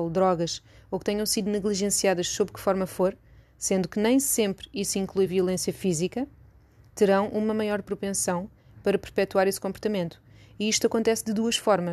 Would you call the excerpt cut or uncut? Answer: uncut